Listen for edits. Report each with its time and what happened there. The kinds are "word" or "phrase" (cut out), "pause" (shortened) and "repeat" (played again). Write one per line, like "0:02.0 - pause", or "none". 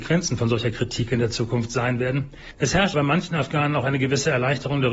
0:02.9 - word